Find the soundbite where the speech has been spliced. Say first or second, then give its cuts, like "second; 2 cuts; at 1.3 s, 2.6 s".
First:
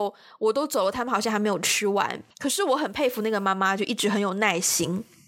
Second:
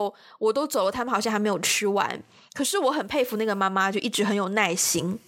first; 1 cut; at 2.3 s